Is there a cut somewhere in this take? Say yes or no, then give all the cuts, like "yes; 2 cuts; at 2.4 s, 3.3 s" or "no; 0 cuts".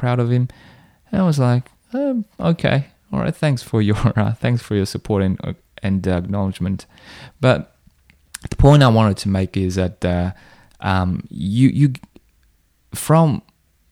no; 0 cuts